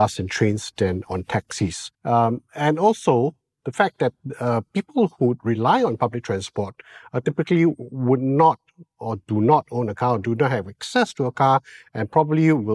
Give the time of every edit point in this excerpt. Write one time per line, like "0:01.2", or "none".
0:01.9